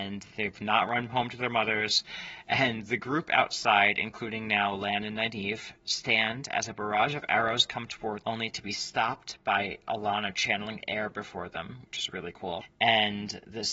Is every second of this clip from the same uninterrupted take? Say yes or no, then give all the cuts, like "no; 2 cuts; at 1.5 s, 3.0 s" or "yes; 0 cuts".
no; 1 cut; at 8.2 s